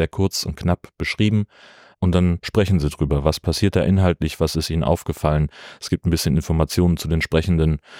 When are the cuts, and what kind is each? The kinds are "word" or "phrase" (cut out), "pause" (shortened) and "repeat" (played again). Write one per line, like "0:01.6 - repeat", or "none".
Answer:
none